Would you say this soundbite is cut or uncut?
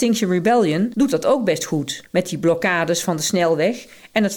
uncut